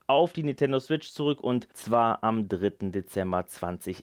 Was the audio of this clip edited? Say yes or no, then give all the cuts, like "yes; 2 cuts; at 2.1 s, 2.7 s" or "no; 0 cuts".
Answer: yes; 1 cut; at 1.7 s